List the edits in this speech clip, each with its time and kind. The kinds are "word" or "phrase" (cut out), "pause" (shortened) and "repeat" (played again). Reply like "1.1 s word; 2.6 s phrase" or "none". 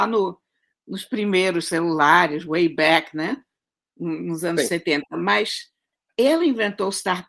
6.1 s word